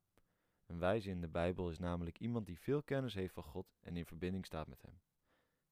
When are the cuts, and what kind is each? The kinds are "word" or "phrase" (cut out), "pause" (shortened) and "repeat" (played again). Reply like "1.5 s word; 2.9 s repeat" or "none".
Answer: none

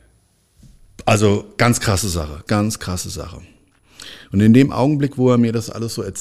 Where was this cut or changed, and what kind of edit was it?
2.5 s word

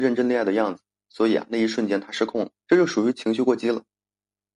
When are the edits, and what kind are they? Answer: 2.6 s pause

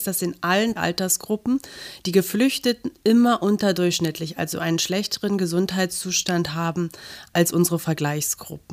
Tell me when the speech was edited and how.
none

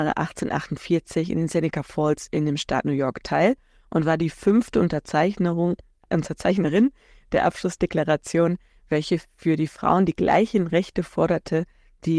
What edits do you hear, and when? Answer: none

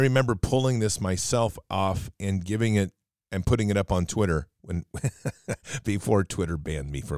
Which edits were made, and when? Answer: none

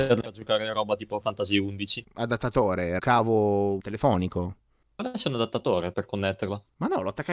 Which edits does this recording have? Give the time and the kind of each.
1.2 s word; 3.0 s word; 3.8 s word; 5.9 s word

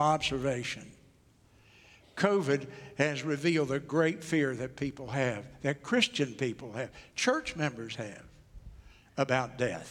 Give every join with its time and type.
none

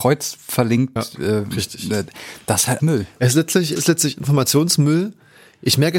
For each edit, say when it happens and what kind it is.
1.0 s word; 2.8 s word; 3.8 s word

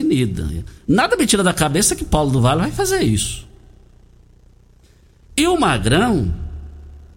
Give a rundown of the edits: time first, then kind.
none

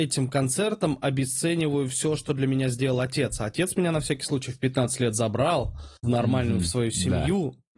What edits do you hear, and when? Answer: 6.0 s pause

